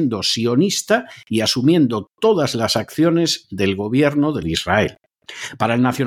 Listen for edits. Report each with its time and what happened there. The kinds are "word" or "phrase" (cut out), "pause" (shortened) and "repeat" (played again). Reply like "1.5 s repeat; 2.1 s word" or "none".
4.4 s word